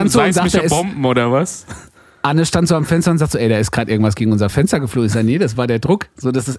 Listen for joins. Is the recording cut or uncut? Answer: uncut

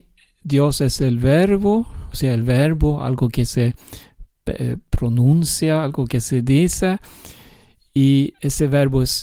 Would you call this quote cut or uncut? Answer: uncut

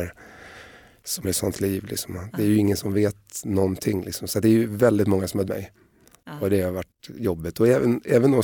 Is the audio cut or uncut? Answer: cut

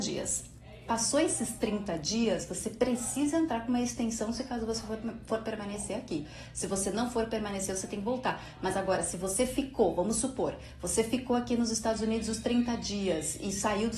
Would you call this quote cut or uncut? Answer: uncut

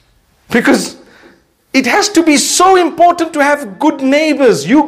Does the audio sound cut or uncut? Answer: uncut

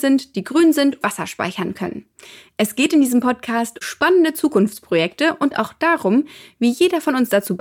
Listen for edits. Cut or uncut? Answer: cut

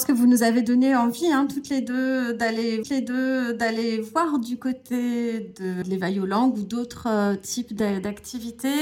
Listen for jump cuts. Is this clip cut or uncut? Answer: cut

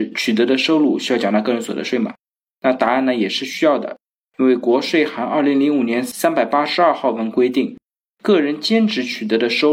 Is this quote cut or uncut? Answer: uncut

